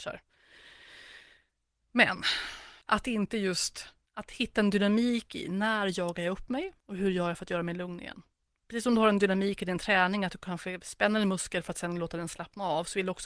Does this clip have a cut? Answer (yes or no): yes